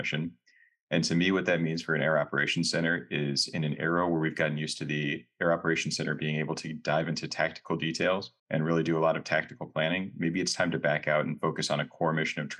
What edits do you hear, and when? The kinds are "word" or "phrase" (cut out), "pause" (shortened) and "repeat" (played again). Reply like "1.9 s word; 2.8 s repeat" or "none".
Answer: 8.4 s pause

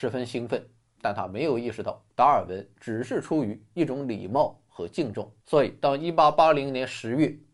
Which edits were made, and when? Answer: 2.1 s pause; 5.4 s pause

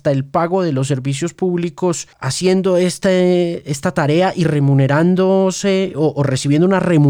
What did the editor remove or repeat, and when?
none

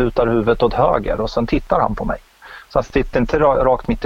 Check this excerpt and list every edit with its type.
none

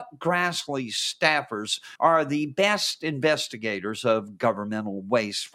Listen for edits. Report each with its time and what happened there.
2.0 s pause

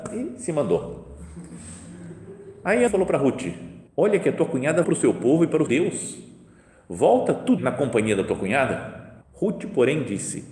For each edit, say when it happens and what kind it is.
2.9 s phrase; 3.9 s pause; 4.8 s word; 5.7 s word; 7.6 s word; 9.2 s pause

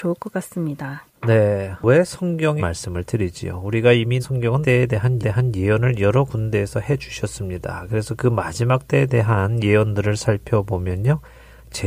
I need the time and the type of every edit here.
2.6 s phrase; 4.2 s phrase; 4.6 s word; 5.2 s repeat

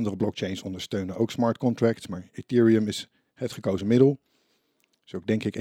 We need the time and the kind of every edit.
none

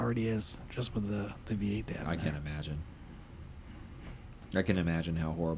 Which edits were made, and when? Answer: none

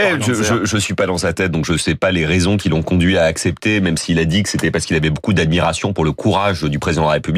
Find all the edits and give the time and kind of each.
none

